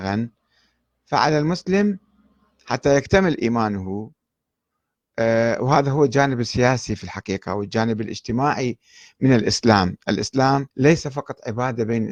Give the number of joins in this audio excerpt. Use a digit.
1